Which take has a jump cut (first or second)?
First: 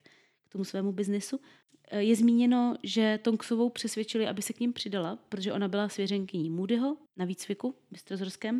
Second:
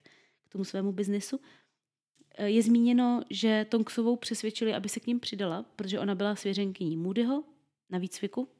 first